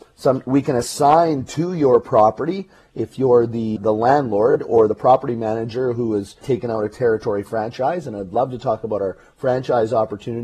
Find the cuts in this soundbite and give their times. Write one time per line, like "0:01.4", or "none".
0:03.8
0:06.4